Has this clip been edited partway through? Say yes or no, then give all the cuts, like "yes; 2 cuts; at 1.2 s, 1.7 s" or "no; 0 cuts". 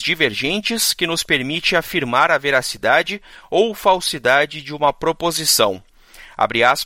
no; 0 cuts